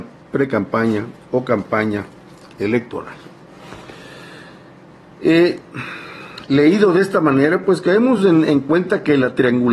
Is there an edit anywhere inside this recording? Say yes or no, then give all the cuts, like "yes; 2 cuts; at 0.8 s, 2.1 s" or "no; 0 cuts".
no; 0 cuts